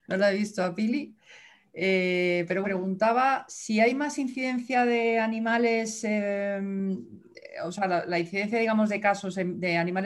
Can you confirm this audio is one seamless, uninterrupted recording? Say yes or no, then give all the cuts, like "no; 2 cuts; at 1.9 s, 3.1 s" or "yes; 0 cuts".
no; 1 cut; at 2.6 s